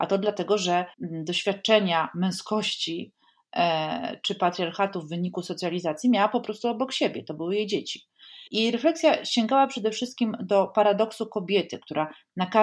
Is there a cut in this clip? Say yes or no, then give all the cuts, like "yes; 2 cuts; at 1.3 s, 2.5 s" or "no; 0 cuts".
yes; 2 cuts; at 0.9 s, 8.5 s